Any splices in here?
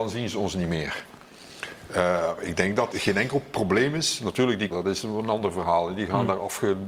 yes; 2 cuts; at 2.9 s, 4.7 s

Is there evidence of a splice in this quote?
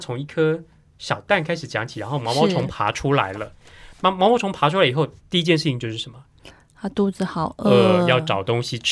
yes; 1 cut; at 5.2 s

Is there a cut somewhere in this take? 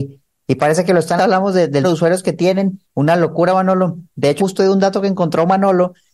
yes; 4 cuts; at 1.2 s, 1.8 s, 2.9 s, 4.4 s

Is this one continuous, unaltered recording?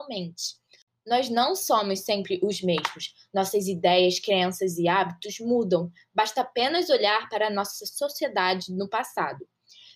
yes; 0 cuts

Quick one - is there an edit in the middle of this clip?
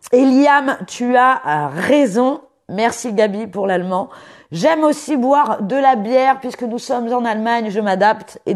no; 0 cuts

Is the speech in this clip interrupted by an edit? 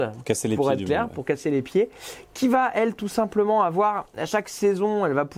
no; 0 cuts

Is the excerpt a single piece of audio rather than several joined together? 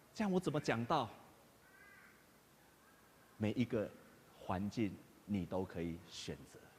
yes; 0 cuts

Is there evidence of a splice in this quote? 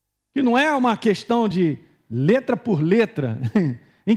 no; 0 cuts

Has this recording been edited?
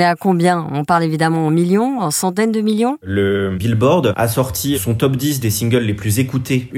no; 0 cuts

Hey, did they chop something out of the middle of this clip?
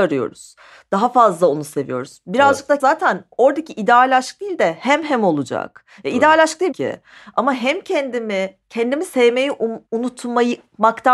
yes; 3 cuts; at 2.8 s, 6.7 s, 9.9 s

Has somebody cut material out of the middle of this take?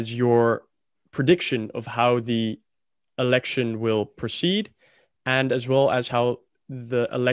no; 0 cuts

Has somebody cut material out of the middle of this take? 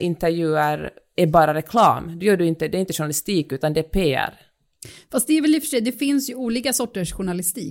no; 0 cuts

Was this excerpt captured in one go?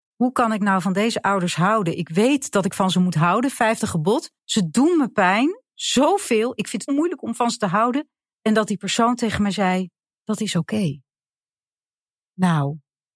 no; 4 cuts; at 4.4 s, 6.9 s, 8.3 s, 10.1 s

